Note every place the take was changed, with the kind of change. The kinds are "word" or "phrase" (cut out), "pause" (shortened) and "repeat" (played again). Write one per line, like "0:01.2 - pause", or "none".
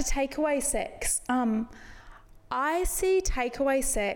none